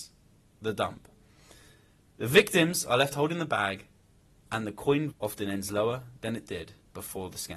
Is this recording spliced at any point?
yes; 1 cut; at 5.1 s

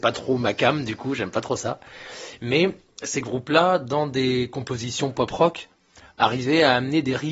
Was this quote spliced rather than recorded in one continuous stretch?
no; 0 cuts

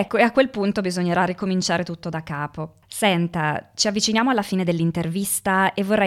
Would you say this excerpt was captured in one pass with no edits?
no; 1 cut; at 2.8 s

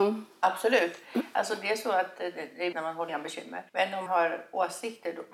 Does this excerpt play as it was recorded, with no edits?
no; 4 cuts; at 2.7 s, 3.1 s, 3.7 s, 4.1 s

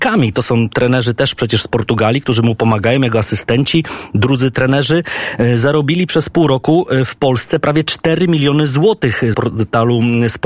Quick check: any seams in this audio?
yes; 1 cut; at 9.3 s

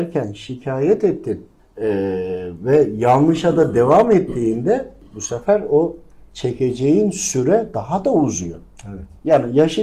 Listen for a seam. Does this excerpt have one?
no; 0 cuts

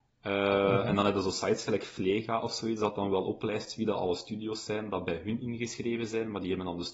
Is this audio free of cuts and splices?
yes; 0 cuts

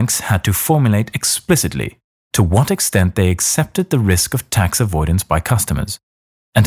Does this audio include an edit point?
no; 0 cuts

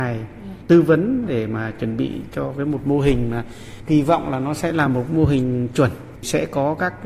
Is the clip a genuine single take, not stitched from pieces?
yes; 0 cuts

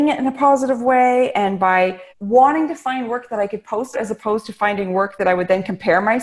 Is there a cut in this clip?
yes; 2 cuts; at 2.1 s, 3.9 s

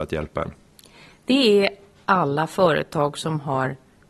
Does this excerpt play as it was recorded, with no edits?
yes; 0 cuts

